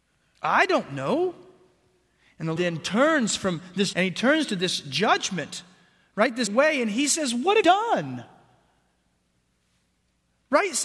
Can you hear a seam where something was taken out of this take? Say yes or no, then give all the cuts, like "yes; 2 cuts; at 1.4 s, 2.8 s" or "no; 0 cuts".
yes; 4 cuts; at 2.6 s, 3.9 s, 6.5 s, 7.6 s